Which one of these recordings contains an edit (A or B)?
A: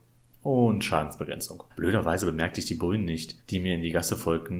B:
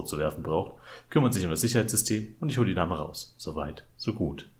A